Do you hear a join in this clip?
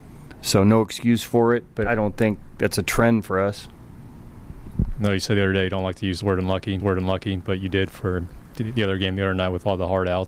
yes; 2 cuts; at 1.8 s, 6.8 s

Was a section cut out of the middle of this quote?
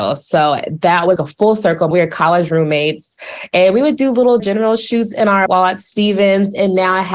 yes; 5 cuts; at 1.2 s, 1.9 s, 4.0 s, 4.4 s, 5.5 s

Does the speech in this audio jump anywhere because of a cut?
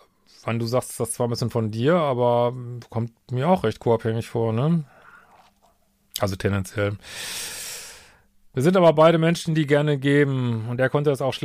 no; 0 cuts

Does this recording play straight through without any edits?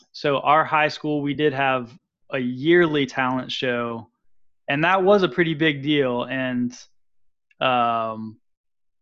yes; 0 cuts

